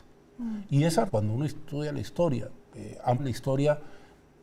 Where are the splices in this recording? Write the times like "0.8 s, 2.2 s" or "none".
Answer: 1.1 s, 2.7 s, 3.2 s

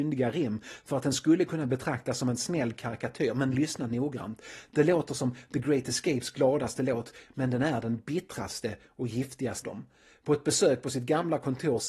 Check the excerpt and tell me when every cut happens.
9.6 s

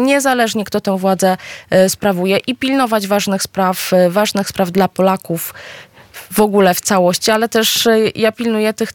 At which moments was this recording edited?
none

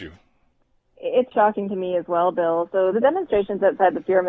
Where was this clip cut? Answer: 1.3 s, 2.9 s

